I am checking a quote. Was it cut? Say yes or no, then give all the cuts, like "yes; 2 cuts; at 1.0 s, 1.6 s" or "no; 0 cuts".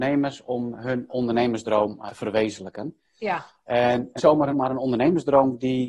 yes; 4 cuts; at 1.1 s, 2.1 s, 4.2 s, 4.5 s